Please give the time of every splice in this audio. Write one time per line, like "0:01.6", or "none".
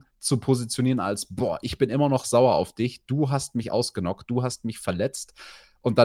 none